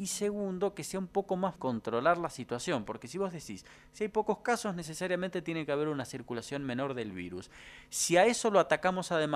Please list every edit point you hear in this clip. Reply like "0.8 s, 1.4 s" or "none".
1.6 s